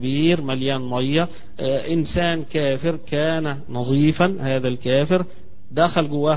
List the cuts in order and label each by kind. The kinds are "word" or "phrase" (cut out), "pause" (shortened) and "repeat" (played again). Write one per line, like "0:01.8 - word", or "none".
none